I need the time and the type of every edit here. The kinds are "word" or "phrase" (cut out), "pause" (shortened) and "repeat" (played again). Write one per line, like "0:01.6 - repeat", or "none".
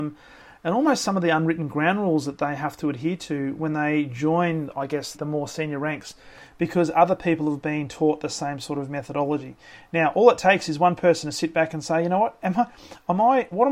0:05.1 - word